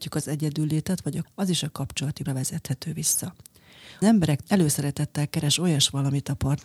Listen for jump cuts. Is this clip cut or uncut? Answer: cut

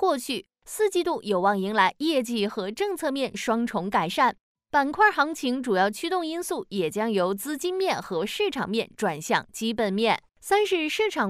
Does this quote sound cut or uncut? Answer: cut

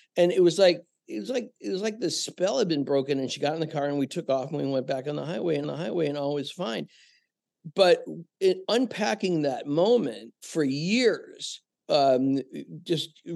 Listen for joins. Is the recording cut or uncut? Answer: cut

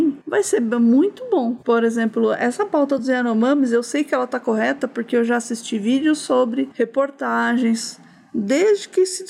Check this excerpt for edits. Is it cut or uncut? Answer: uncut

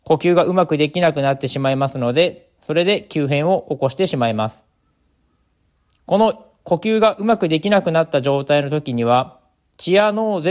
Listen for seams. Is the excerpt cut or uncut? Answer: uncut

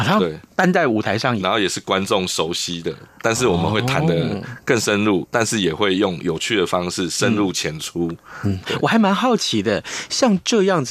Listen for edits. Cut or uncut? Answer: cut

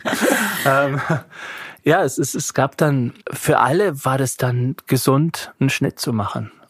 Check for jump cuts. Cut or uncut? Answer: cut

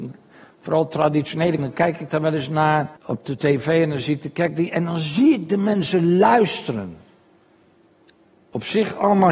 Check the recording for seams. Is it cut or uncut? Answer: cut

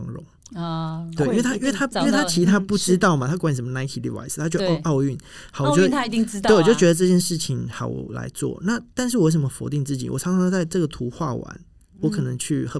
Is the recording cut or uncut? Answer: uncut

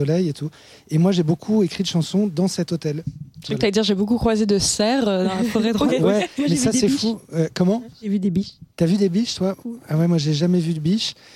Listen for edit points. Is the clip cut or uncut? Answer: cut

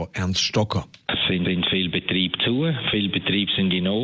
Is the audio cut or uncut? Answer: cut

